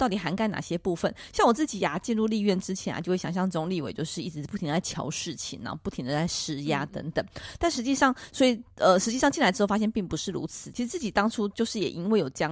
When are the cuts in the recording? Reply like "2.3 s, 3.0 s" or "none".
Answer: 10.7 s